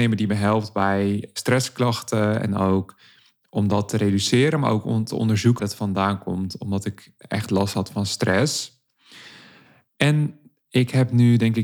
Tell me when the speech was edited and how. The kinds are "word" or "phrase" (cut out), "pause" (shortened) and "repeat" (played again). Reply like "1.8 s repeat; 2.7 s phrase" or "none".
5.6 s word